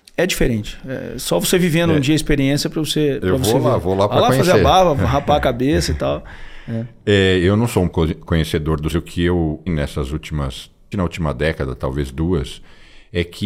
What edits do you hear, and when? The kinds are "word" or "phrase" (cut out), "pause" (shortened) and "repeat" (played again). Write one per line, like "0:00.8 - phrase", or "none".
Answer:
0:07.9 - word
0:08.9 - phrase
0:09.7 - word
0:10.9 - word